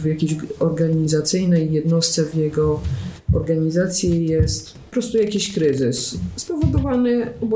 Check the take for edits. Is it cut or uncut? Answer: cut